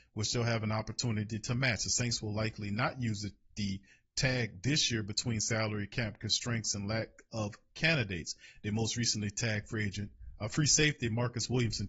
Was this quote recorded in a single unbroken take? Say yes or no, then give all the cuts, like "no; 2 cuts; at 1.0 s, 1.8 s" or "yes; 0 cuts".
yes; 0 cuts